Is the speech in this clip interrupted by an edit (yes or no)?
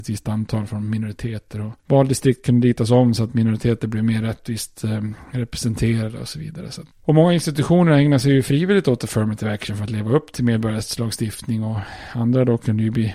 yes